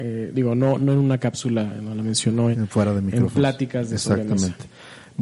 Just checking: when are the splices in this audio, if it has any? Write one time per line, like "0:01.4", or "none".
0:02.5